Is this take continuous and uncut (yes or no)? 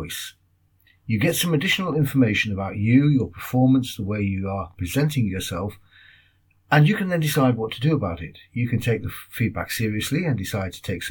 yes